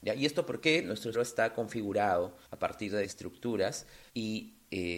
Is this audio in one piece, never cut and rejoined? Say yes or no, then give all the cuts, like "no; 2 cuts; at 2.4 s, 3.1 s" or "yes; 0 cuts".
no; 4 cuts; at 1.1 s, 2.5 s, 3.0 s, 4.1 s